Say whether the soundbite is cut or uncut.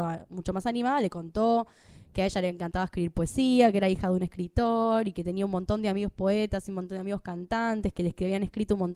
uncut